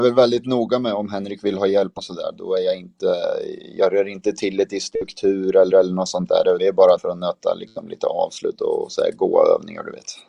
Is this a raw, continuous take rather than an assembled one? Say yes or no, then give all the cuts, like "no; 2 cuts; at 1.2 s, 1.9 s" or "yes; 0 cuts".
no; 4 cuts; at 2.0 s, 5.7 s, 6.6 s, 7.0 s